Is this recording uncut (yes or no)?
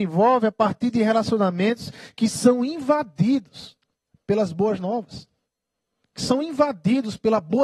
yes